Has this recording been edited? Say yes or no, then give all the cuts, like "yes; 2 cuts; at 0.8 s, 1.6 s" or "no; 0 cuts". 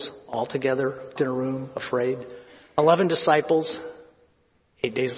yes; 1 cut; at 1.2 s